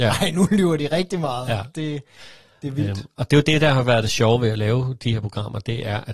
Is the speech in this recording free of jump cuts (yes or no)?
yes